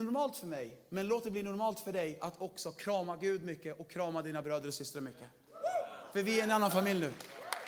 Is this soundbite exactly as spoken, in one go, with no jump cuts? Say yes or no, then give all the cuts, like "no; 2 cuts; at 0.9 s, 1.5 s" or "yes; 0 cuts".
yes; 0 cuts